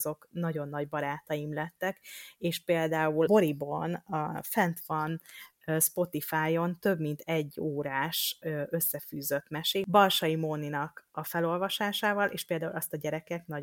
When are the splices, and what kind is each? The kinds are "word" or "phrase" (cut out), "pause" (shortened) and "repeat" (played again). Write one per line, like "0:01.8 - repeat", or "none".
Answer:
0:03.3 - word